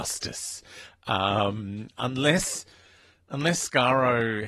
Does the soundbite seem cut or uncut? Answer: uncut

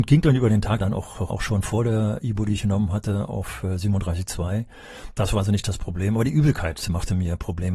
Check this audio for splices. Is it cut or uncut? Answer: cut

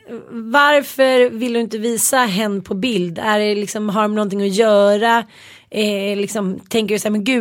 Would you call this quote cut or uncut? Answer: uncut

